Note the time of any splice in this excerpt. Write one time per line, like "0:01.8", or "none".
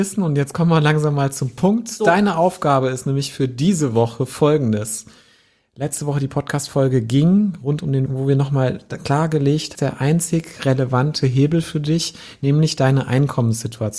0:08.1
0:09.7